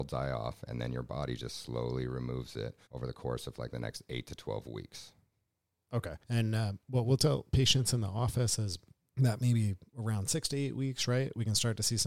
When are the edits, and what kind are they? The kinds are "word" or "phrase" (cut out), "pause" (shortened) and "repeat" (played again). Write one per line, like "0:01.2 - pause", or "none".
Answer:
0:02.8 - pause
0:06.2 - pause
0:09.0 - pause